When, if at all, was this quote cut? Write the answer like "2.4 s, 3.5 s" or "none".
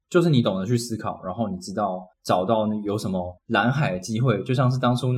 2.1 s, 3.4 s